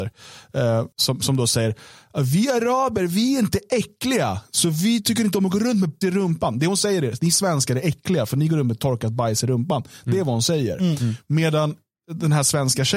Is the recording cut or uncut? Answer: cut